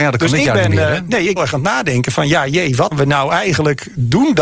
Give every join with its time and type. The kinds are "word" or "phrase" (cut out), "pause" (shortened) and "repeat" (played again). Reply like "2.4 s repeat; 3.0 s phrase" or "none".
1.4 s phrase; 2.9 s word